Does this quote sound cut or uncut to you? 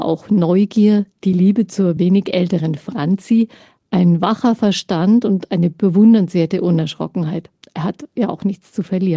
uncut